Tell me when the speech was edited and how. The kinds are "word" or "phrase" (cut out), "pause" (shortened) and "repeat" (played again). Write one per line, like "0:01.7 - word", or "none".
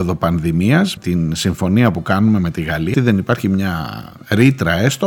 0:01.0 - word
0:02.9 - word